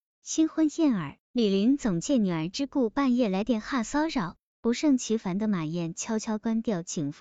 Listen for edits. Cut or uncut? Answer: cut